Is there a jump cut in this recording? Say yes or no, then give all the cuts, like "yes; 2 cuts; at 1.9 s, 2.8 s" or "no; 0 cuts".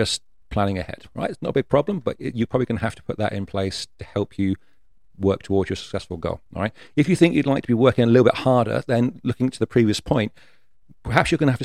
no; 0 cuts